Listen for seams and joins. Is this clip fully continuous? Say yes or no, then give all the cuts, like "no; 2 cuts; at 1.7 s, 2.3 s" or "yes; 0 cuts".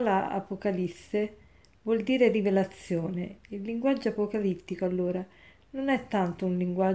yes; 0 cuts